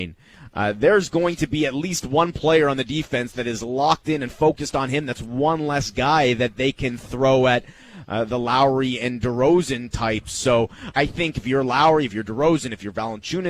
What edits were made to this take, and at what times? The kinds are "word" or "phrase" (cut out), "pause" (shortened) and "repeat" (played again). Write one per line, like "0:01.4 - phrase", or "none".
0:10.9 - word